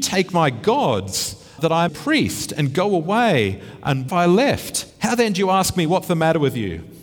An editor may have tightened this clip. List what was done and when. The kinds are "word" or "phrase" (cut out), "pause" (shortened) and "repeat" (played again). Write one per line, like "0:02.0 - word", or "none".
0:01.6 - word
0:01.9 - phrase
0:04.1 - phrase
0:04.9 - pause